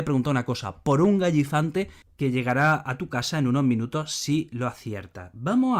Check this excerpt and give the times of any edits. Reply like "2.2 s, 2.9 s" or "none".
none